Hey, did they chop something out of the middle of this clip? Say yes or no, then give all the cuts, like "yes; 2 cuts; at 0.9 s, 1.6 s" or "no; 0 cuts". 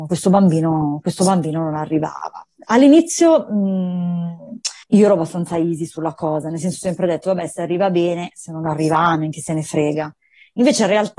yes; 1 cut; at 4.8 s